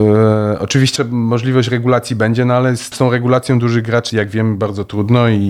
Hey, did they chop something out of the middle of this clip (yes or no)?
yes